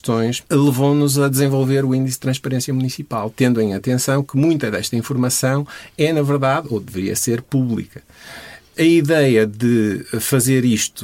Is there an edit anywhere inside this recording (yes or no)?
no